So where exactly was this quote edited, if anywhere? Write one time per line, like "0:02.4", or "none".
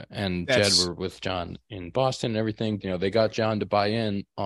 0:02.8